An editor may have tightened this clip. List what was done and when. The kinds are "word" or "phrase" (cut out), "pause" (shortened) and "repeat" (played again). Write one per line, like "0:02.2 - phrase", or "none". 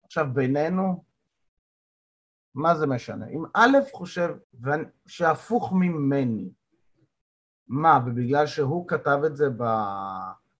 0:04.4 - word